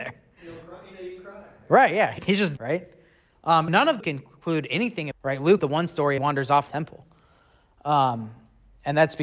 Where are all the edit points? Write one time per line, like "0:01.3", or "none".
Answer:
0:02.2
0:02.6
0:03.7
0:04.0
0:05.1
0:05.6
0:06.2
0:06.7